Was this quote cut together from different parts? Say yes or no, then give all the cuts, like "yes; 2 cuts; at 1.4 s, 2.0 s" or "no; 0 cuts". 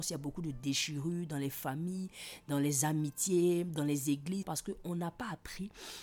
yes; 1 cut; at 4.4 s